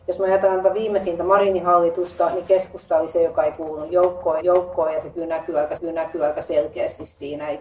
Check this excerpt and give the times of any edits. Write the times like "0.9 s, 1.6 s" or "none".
4.4 s, 5.8 s